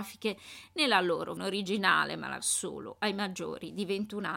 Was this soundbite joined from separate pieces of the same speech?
yes; 2 cuts; at 1.4 s, 2.4 s

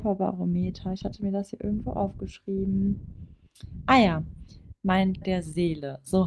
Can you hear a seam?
yes; 1 cut; at 5.2 s

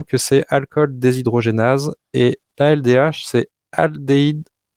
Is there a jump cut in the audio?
no; 0 cuts

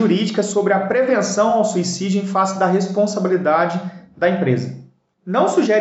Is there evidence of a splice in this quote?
no; 0 cuts

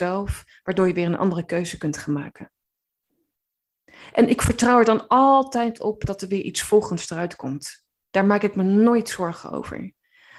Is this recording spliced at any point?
no; 0 cuts

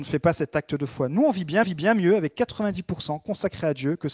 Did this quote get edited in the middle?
yes; 1 cut; at 1.6 s

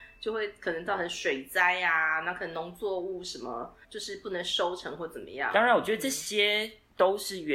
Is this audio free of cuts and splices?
no; 1 cut; at 3.8 s

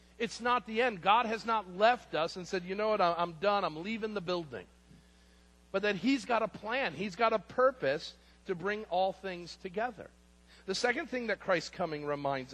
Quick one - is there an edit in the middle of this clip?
no; 0 cuts

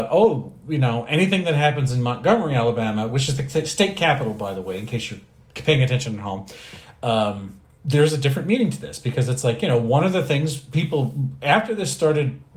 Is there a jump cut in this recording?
no; 0 cuts

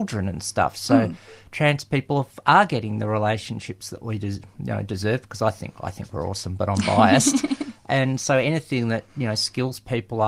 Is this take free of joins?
yes; 0 cuts

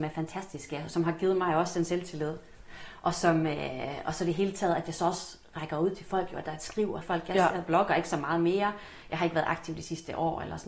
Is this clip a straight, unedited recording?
no; 1 cut; at 7.0 s

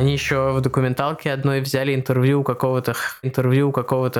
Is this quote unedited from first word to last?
no; 1 cut; at 3.2 s

